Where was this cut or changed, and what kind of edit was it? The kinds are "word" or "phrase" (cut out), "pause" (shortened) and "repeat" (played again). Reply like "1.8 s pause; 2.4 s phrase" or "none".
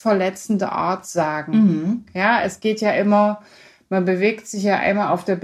none

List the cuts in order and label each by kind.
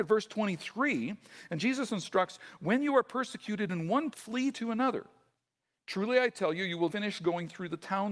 4.1 s word; 6.9 s word

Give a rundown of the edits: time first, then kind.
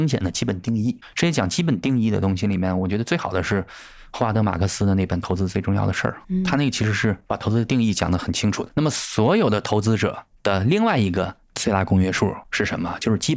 6.2 s pause

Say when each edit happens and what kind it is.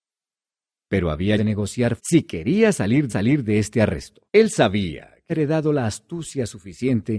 1.4 s phrase; 2.0 s word; 3.1 s repeat; 4.3 s pause; 5.3 s word

